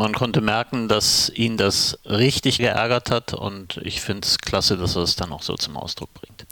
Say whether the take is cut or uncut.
cut